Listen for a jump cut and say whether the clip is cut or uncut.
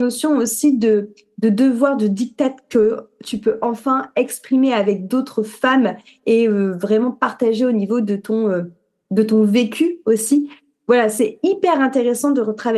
uncut